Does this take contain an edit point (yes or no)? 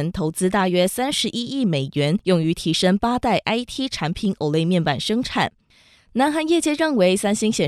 no